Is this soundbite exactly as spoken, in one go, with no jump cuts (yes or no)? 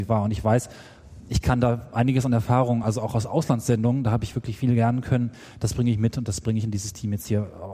yes